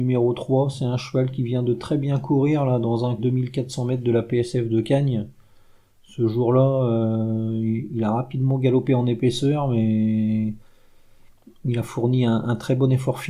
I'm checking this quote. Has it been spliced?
yes; 1 cut; at 3.2 s

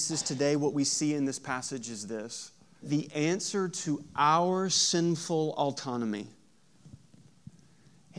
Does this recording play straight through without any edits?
no; 1 cut; at 2.8 s

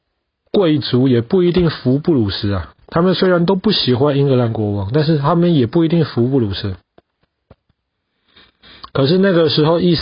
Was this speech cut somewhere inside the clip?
yes; 1 cut; at 2.8 s

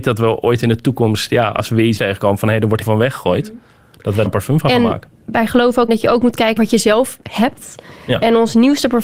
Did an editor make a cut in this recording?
yes; 5 cuts; at 2.0 s, 2.8 s, 4.3 s, 5.9 s, 6.6 s

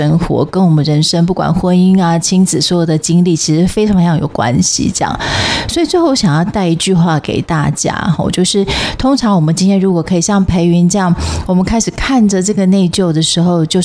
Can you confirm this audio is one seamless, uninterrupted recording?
yes; 0 cuts

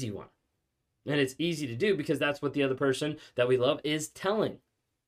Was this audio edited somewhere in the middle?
no; 0 cuts

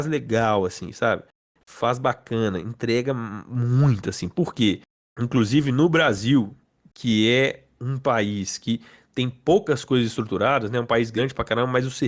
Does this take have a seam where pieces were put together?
no; 0 cuts

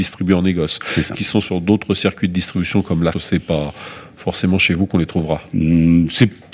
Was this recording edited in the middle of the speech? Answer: yes; 2 cuts; at 1.1 s, 3.1 s

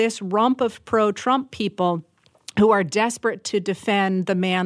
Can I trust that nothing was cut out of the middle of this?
yes; 0 cuts

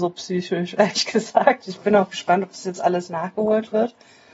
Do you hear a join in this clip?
no; 0 cuts

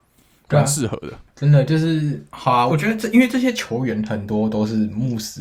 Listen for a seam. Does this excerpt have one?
yes; 2 cuts; at 2.3 s, 2.7 s

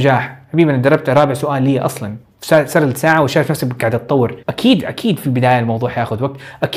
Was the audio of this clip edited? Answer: yes; 1 cut; at 4.4 s

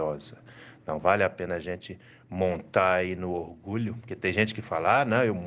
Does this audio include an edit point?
no; 0 cuts

